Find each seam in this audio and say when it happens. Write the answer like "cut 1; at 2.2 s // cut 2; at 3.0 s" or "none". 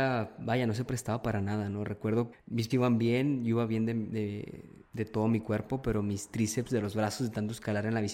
cut 1; at 2.3 s // cut 2; at 2.7 s // cut 3; at 4.9 s